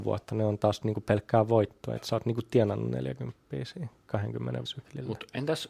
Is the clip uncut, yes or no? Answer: no